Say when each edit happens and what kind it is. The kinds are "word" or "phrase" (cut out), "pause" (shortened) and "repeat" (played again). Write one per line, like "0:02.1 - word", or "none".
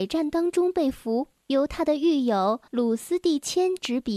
0:01.4 - pause
0:02.7 - pause